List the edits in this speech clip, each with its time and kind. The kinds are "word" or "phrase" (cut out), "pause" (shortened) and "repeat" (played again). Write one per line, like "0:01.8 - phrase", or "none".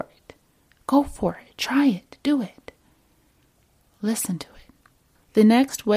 none